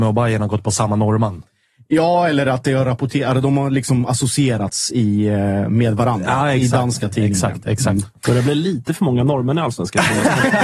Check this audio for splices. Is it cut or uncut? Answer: uncut